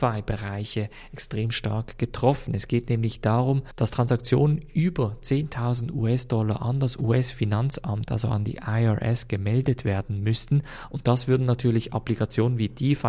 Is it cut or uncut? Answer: uncut